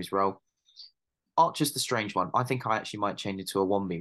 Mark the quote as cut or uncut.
uncut